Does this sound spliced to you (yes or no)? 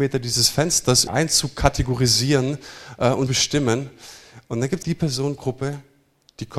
yes